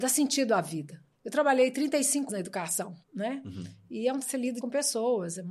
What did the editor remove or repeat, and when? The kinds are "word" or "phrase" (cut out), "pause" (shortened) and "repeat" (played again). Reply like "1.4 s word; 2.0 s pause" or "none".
1.1 s pause; 2.3 s word; 3.0 s pause; 4.2 s word; 4.6 s word

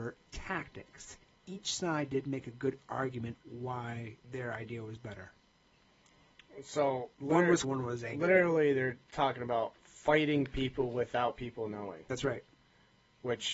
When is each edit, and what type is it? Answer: 4.2 s pause; 7.1 s pause; 7.6 s phrase

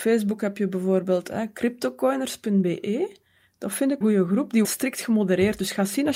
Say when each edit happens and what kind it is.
4.0 s word; 4.6 s phrase

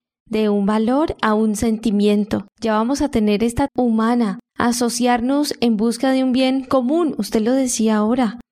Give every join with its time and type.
2.5 s pause; 3.7 s word; 4.5 s pause

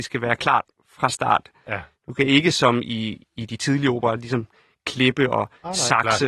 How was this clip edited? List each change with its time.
none

